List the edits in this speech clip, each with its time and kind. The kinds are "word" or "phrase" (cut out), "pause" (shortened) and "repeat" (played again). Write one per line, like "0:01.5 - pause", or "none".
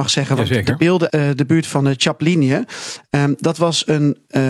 0:01.1 - word